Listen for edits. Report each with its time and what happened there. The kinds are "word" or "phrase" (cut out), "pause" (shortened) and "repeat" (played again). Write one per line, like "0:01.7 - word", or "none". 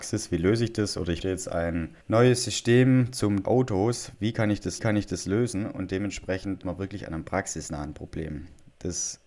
0:01.2 - word
0:02.0 - pause
0:03.4 - phrase
0:04.8 - repeat
0:06.6 - word